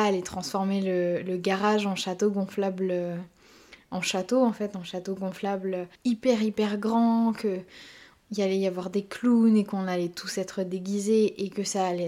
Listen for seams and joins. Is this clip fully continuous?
no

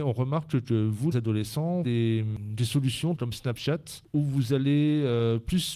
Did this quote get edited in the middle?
yes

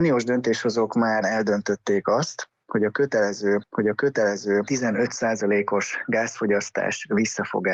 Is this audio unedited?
no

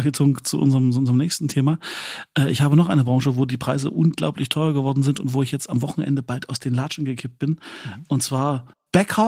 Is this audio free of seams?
yes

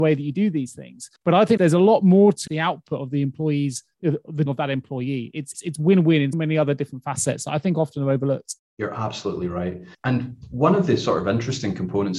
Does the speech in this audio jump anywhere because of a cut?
yes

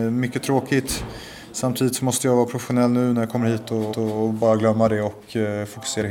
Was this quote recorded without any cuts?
no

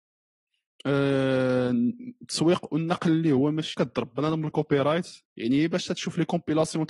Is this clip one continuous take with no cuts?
no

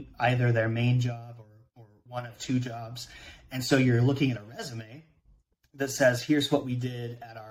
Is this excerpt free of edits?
yes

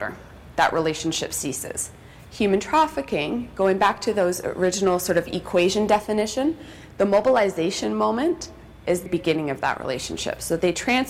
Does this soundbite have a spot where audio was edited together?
yes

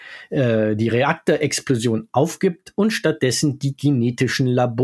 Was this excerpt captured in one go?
yes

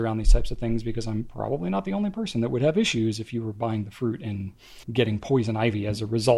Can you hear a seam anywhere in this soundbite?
yes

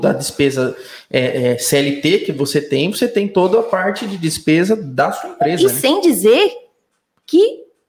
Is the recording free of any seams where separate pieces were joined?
yes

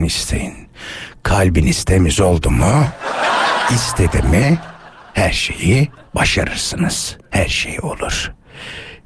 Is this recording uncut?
yes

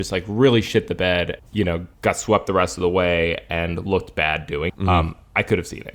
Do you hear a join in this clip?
yes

